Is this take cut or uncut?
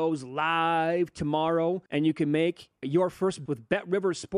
cut